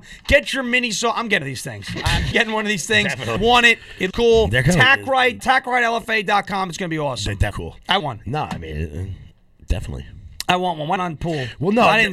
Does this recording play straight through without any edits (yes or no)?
no